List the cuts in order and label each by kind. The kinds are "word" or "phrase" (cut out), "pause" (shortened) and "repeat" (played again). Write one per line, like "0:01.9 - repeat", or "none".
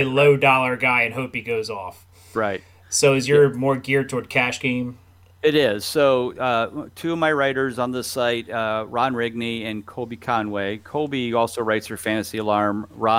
none